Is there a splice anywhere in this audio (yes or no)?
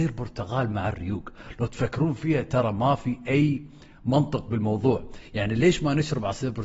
no